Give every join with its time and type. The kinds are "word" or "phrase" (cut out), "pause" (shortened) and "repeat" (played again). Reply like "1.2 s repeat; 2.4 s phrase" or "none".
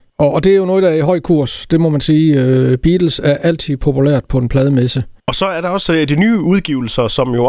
5.2 s pause